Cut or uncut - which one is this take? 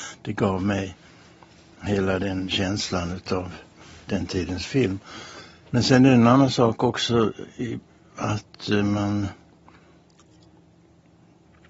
uncut